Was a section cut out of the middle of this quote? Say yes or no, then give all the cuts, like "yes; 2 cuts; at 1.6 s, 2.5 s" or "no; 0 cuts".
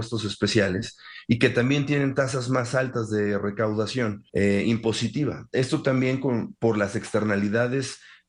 yes; 1 cut; at 4.3 s